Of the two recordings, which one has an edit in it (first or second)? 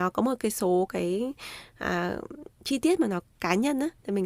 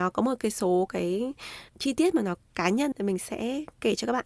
second